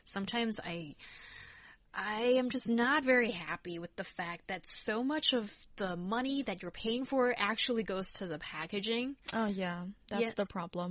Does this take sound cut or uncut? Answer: uncut